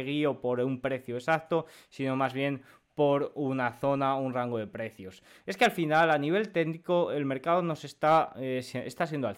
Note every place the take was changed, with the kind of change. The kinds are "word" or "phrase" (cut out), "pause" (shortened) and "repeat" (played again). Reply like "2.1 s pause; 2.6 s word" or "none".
none